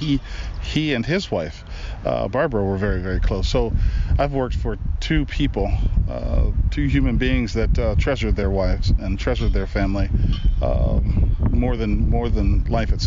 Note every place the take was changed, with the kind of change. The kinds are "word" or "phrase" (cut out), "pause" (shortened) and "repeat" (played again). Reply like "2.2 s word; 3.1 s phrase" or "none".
none